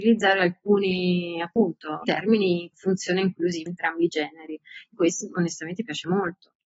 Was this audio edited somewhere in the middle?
yes; 4 cuts; at 2.0 s, 2.7 s, 3.7 s, 4.9 s

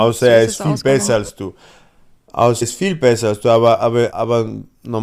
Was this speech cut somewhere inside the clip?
yes; 2 cuts; at 2.6 s, 4.1 s

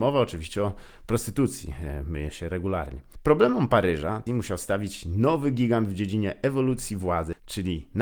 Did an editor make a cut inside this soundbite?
yes; 1 cut; at 4.3 s

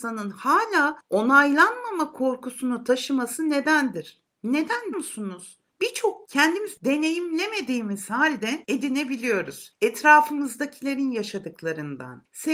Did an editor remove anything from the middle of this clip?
yes; 2 cuts; at 4.9 s, 6.2 s

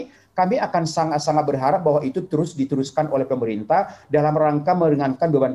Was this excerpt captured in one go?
yes; 0 cuts

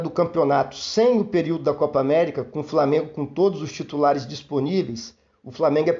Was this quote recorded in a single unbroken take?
yes; 0 cuts

